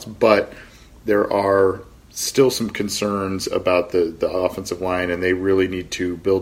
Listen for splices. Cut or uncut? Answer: uncut